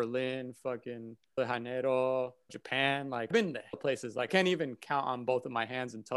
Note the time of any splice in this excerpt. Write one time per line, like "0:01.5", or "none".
0:01.4
0:02.5
0:03.3
0:03.7
0:04.3